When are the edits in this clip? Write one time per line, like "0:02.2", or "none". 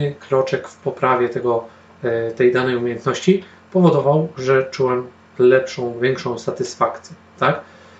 none